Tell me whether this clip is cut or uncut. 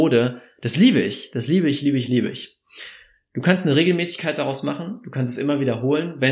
uncut